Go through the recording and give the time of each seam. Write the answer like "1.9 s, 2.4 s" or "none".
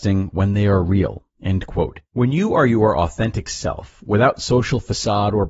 1.3 s, 2.1 s